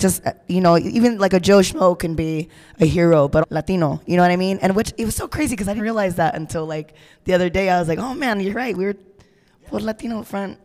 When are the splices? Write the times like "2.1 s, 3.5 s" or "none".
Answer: 3.4 s, 5.8 s